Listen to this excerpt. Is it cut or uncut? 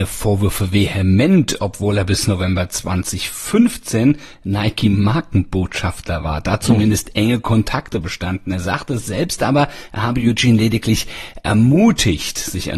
uncut